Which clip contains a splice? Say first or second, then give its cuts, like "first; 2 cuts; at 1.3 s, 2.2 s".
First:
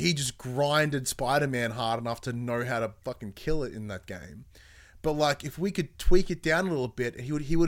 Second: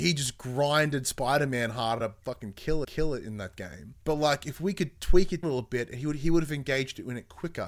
second; 4 cuts; at 2.0 s, 2.8 s, 4.0 s, 5.4 s